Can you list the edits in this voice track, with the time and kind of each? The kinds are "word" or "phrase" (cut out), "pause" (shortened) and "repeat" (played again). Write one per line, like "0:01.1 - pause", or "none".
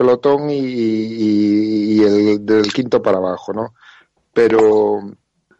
none